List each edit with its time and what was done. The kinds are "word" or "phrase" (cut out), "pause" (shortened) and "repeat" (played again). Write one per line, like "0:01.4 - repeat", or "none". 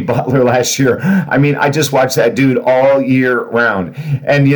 none